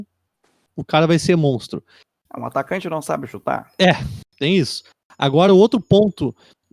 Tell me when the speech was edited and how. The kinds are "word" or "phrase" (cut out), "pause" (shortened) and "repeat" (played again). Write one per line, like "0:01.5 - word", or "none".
none